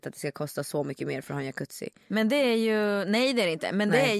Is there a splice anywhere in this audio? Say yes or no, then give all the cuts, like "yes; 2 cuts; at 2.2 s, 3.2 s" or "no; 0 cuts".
no; 0 cuts